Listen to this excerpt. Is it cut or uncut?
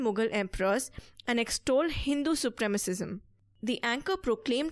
uncut